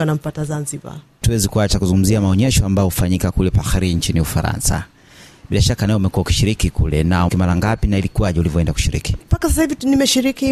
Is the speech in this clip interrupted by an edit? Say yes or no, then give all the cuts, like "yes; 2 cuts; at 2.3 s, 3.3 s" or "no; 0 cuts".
yes; 1 cut; at 7.3 s